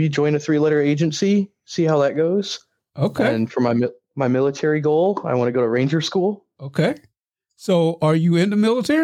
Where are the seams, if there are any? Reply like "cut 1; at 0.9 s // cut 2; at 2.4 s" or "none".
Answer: none